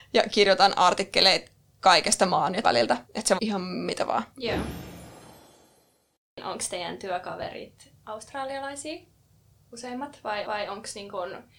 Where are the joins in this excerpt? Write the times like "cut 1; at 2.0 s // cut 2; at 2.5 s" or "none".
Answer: cut 1; at 2.6 s // cut 2; at 3.0 s // cut 3; at 3.4 s // cut 4; at 4.3 s // cut 5; at 10.4 s